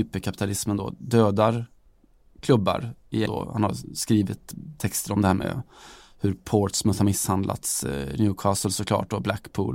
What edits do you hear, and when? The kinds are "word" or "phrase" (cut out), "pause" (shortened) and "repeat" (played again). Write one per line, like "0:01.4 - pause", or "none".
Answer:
0:03.3 - word